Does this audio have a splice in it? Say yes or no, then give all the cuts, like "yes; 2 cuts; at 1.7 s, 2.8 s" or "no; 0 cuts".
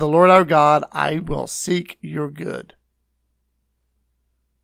no; 0 cuts